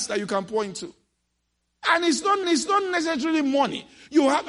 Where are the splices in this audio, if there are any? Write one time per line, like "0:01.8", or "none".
0:02.4

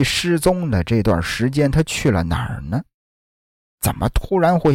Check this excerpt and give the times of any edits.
none

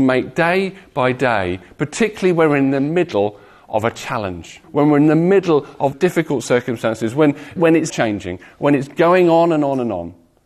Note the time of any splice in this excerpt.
0:04.6
0:05.9
0:07.6
0:07.9

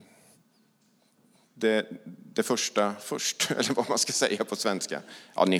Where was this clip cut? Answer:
none

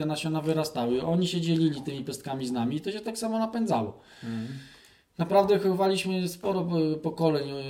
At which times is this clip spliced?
none

